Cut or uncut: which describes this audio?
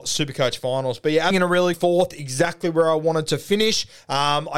cut